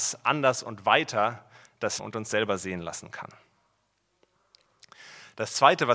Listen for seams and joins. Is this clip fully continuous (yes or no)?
no